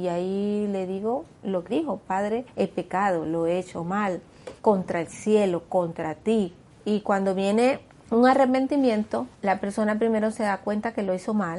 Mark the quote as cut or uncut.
cut